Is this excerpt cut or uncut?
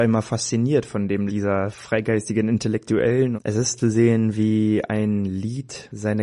cut